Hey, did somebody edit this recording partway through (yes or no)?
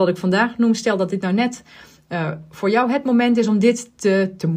no